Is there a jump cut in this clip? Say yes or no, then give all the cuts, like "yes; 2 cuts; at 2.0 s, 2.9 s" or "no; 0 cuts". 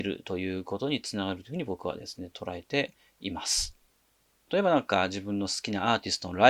no; 0 cuts